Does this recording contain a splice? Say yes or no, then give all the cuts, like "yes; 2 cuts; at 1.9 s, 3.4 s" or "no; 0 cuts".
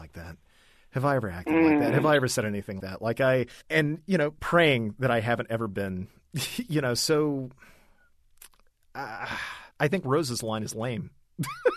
yes; 3 cuts; at 2.8 s, 3.6 s, 9.7 s